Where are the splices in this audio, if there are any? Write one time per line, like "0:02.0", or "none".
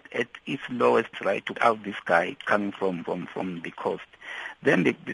0:01.1
0:01.5
0:03.0